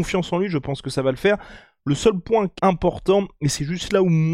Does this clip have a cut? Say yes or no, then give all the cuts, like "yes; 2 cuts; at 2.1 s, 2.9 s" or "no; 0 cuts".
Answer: yes; 1 cut; at 2.6 s